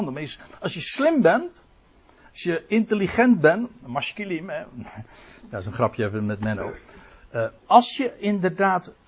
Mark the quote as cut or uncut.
cut